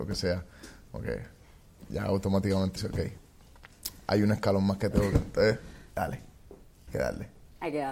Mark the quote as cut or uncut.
cut